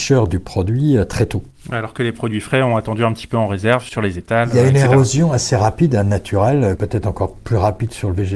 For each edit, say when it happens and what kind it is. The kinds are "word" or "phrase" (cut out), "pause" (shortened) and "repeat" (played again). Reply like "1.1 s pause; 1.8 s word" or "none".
none